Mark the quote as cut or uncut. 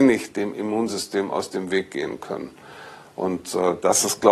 uncut